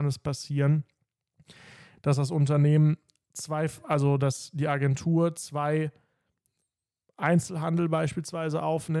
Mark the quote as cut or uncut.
uncut